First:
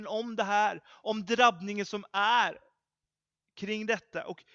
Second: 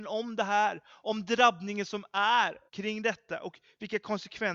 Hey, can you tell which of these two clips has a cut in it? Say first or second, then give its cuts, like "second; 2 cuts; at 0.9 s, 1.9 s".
second; 1 cut; at 2.7 s